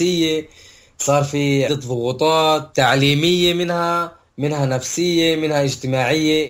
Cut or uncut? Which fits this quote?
cut